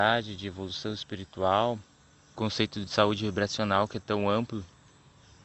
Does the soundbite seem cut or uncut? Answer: cut